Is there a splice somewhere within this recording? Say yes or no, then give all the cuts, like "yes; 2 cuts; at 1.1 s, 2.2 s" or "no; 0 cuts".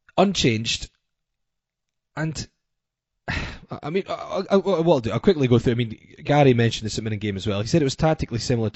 no; 0 cuts